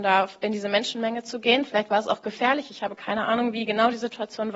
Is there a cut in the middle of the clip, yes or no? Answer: no